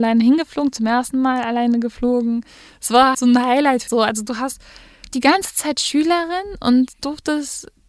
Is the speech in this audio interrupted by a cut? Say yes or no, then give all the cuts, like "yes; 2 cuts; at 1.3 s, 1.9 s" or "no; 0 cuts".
yes; 3 cuts; at 3.1 s, 3.9 s, 5.1 s